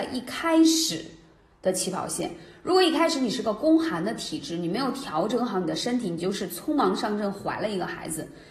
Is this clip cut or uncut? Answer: uncut